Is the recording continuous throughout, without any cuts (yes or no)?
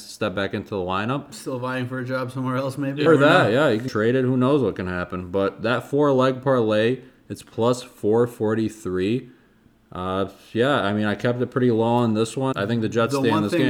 no